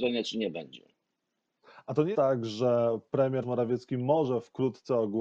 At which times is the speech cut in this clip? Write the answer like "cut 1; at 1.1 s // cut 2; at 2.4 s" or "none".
cut 1; at 2.1 s // cut 2; at 3.4 s